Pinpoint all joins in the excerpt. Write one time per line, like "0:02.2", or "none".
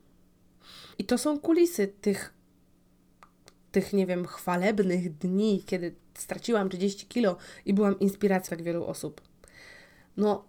0:00.9
0:08.5